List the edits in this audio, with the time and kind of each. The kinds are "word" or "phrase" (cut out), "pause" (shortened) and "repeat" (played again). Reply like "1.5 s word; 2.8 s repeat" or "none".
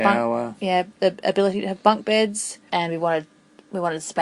2.7 s pause